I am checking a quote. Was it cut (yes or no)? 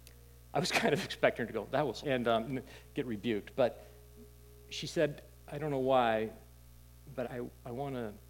yes